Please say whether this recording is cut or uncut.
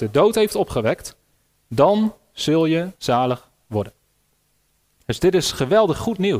uncut